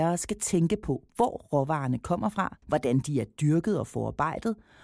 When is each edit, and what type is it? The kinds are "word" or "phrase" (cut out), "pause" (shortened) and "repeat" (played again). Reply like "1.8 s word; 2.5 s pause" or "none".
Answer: 2.6 s pause